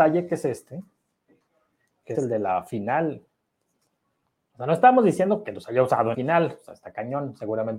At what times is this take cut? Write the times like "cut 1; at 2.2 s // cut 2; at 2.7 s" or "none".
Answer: cut 1; at 2.1 s // cut 2; at 6.1 s